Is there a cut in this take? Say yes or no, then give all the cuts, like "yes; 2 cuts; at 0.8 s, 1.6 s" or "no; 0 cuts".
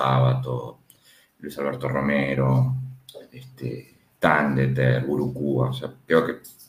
no; 0 cuts